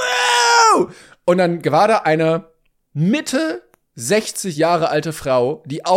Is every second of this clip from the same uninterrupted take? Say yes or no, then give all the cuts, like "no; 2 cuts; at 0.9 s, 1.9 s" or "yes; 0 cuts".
yes; 0 cuts